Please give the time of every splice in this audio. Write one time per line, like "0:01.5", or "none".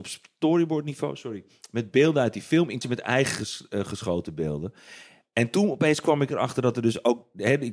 0:02.8

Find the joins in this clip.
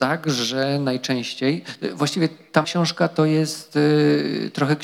0:02.6

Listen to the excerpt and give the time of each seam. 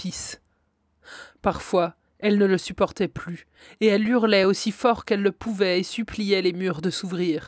none

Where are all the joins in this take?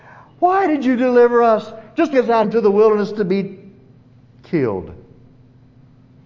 0:02.1
0:02.4

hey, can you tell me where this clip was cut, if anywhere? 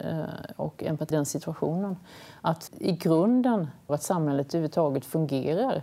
0:01.1
0:02.7
0:03.9

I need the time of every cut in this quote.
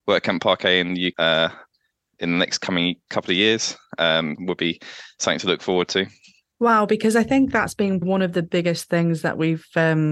0:01.1
0:04.3
0:08.0

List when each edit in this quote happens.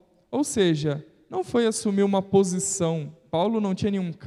none

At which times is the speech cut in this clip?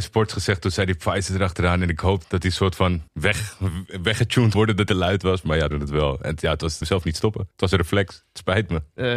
0:02.2
0:03.1
0:04.5
0:04.9
0:05.7
0:06.8
0:07.5

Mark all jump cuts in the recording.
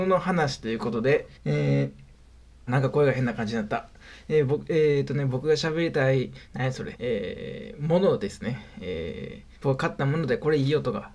0:01.3
0:02.7
0:06.4
0:06.9
0:09.5

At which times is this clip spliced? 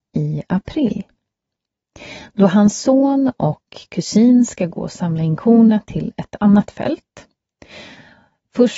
none

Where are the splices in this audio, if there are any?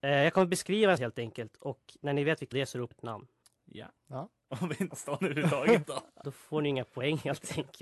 0:01.0
0:02.5
0:02.9
0:03.4
0:04.0
0:04.9
0:06.2

